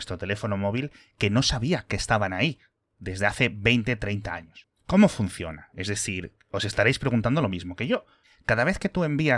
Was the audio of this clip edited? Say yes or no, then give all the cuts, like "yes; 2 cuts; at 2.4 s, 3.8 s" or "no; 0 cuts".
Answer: no; 0 cuts